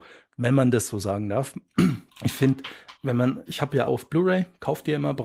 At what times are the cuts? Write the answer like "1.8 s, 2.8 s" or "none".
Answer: 2.1 s, 3.0 s, 3.5 s, 3.9 s